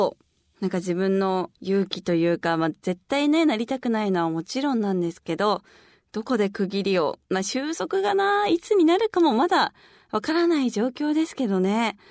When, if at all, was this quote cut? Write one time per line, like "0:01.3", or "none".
0:01.5